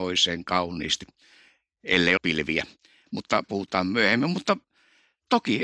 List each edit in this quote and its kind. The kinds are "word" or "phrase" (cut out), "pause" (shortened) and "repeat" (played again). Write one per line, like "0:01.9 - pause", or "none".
0:02.2 - word
0:03.4 - word